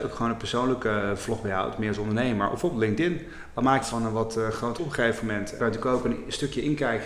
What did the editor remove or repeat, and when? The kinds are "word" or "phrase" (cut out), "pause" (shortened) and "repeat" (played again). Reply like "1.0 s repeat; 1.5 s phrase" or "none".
3.8 s phrase; 4.8 s word; 5.6 s phrase